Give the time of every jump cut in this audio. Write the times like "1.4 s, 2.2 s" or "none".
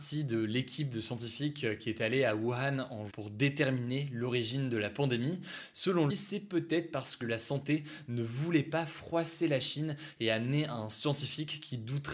3.1 s, 6.1 s, 7.2 s